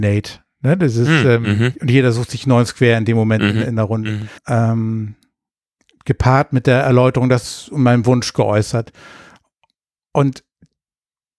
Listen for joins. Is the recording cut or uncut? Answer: cut